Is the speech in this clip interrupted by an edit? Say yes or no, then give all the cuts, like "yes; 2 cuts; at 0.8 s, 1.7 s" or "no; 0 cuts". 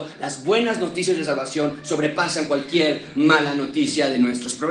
no; 0 cuts